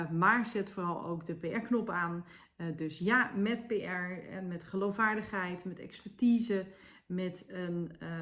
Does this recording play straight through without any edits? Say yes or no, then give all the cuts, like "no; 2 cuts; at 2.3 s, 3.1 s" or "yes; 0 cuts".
yes; 0 cuts